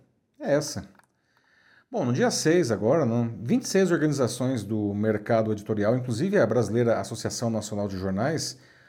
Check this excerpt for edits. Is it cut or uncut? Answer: uncut